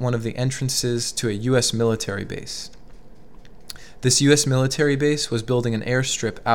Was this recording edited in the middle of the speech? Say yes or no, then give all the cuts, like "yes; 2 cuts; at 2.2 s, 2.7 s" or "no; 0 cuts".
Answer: no; 0 cuts